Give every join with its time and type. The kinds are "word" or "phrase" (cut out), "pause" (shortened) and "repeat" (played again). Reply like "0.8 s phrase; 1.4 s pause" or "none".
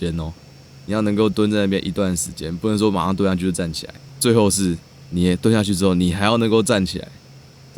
none